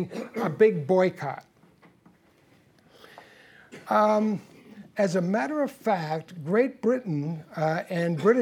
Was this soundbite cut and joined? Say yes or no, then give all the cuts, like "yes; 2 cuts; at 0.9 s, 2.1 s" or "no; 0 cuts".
no; 0 cuts